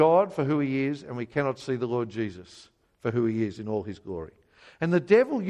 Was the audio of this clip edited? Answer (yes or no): no